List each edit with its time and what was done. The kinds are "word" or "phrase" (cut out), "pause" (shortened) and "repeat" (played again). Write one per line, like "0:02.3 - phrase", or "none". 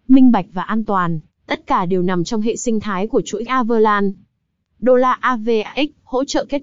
0:03.5 - word